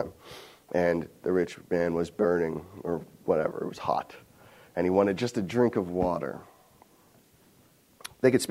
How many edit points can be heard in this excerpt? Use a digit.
0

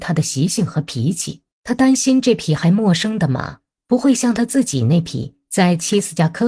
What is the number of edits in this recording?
1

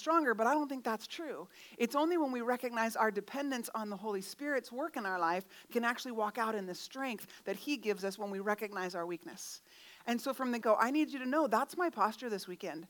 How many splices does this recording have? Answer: 2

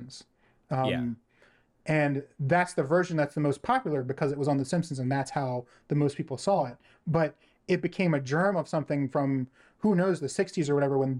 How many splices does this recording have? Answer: 0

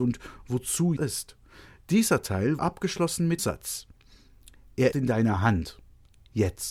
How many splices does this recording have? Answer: 4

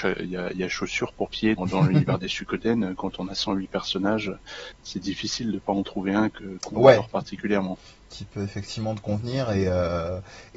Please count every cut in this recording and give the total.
3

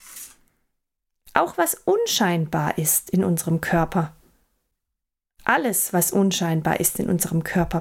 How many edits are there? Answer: 0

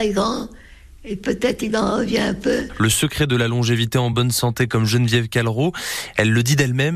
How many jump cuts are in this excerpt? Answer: 0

